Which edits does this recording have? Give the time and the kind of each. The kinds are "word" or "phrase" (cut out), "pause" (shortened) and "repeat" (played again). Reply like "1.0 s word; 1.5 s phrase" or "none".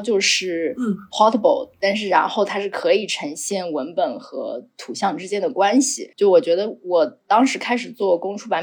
6.1 s pause

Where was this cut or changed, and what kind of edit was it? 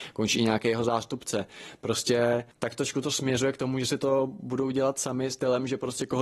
2.5 s pause

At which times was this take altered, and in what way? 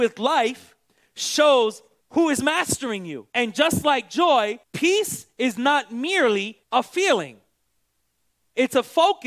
2.0 s pause; 3.3 s pause; 4.6 s pause; 6.6 s pause

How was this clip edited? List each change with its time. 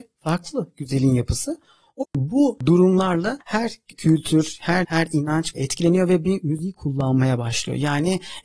2.0 s word; 3.9 s word; 4.8 s word; 5.5 s word

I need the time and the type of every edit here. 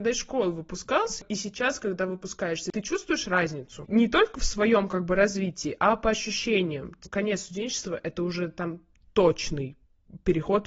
none

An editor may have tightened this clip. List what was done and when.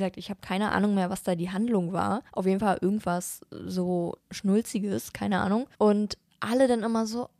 2.3 s pause; 4.2 s pause; 5.7 s pause

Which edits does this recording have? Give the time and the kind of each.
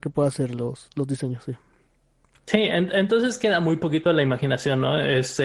none

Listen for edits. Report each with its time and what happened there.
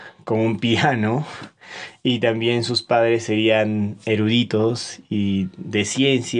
none

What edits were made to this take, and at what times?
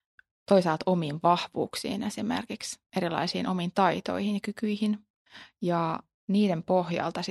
none

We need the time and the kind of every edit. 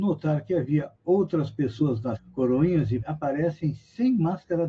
1.0 s pause; 2.2 s word; 3.0 s word

